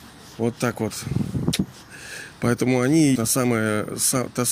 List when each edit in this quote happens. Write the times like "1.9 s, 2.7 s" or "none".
3.2 s

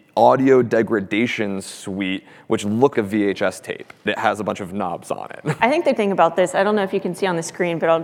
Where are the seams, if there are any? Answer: 2.9 s, 4.1 s, 6.0 s

